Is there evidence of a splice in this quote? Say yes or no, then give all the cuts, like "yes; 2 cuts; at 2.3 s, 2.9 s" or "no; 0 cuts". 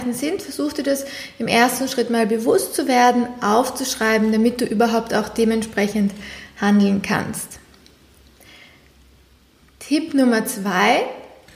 no; 0 cuts